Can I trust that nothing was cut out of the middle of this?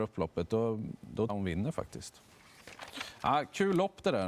no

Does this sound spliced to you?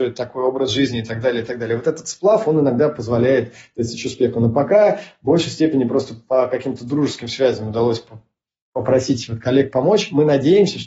no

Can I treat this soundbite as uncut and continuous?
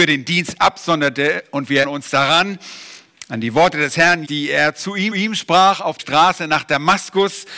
no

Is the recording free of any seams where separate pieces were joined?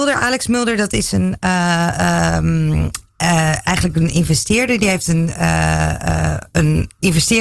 yes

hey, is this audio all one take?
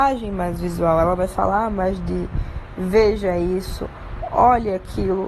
yes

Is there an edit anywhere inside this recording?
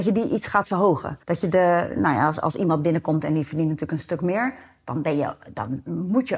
yes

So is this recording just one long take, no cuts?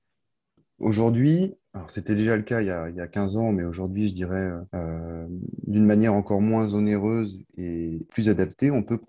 yes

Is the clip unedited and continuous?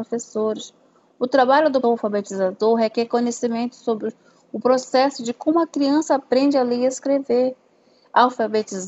no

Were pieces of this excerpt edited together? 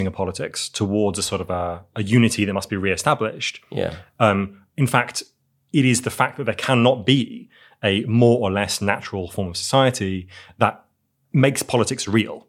no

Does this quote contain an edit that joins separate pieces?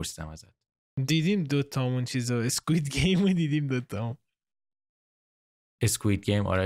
no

